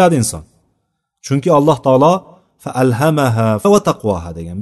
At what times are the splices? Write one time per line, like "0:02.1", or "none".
0:03.6